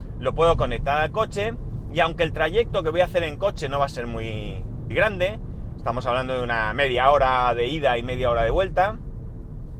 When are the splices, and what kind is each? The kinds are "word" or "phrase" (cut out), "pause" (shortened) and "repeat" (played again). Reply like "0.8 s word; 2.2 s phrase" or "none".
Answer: 4.9 s word